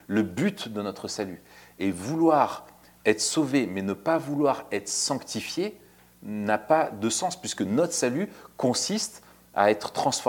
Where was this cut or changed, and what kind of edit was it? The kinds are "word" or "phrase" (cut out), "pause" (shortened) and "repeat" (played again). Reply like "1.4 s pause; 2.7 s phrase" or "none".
none